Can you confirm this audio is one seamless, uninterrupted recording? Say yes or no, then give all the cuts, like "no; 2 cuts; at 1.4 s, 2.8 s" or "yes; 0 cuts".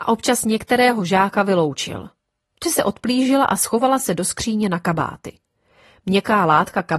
no; 1 cut; at 2.6 s